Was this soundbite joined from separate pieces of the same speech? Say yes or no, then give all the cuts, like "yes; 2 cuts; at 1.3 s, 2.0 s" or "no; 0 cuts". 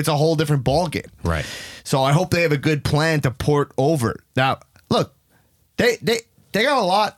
no; 0 cuts